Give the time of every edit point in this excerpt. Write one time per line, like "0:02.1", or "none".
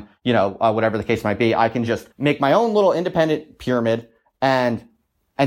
0:02.1